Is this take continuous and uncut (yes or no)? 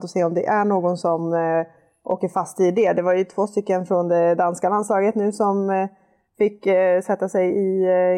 yes